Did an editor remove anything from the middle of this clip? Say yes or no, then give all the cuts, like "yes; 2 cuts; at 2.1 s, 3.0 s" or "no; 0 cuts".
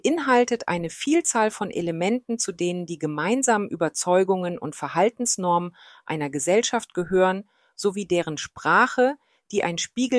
no; 0 cuts